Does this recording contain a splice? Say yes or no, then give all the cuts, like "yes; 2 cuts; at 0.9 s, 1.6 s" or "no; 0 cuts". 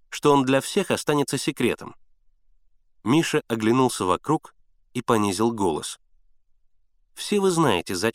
no; 0 cuts